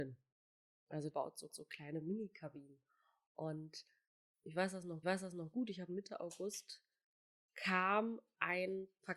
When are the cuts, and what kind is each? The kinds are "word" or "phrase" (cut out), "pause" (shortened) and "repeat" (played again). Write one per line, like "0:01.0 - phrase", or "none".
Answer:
0:01.1 - word
0:01.5 - repeat
0:05.0 - repeat
0:05.9 - phrase